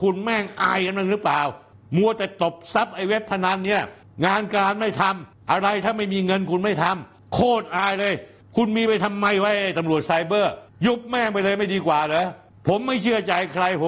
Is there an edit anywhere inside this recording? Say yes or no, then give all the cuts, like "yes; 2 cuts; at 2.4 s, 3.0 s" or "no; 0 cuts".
no; 0 cuts